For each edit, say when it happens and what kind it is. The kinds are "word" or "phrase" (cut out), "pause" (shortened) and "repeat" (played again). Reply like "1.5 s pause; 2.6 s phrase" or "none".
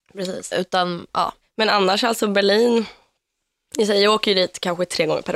none